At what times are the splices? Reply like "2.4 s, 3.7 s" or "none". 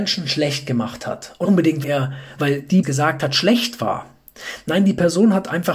1.4 s, 1.8 s, 2.4 s, 2.8 s